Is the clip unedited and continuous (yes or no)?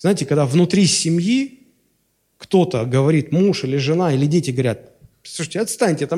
yes